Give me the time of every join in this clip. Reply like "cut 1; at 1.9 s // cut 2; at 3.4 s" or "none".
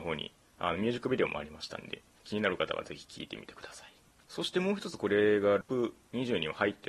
none